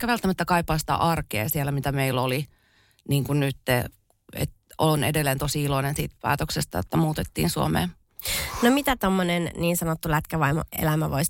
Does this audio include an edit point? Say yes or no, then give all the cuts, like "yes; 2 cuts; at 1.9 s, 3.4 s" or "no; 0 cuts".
no; 0 cuts